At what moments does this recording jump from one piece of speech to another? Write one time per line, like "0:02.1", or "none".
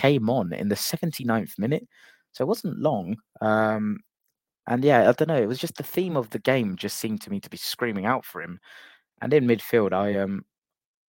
none